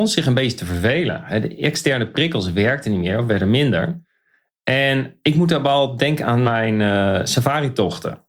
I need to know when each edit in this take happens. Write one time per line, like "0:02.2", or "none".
none